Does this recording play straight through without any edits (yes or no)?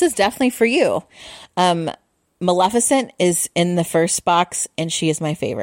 yes